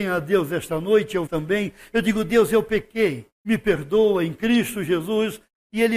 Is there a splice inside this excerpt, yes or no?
yes